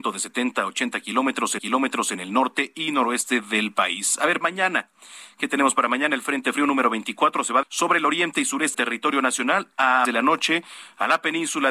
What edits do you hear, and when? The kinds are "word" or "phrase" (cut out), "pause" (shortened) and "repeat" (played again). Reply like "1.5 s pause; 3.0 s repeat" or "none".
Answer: 1.6 s repeat; 4.4 s word; 7.6 s word; 8.7 s word; 10.0 s phrase